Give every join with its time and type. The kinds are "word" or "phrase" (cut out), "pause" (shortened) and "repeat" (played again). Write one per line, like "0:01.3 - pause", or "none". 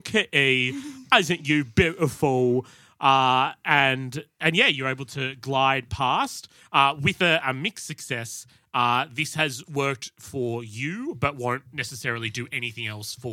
none